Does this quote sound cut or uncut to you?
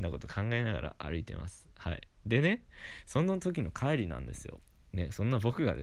cut